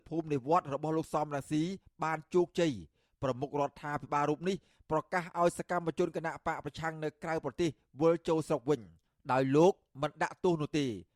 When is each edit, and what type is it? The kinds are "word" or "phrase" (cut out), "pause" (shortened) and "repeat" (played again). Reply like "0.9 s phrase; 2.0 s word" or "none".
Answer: none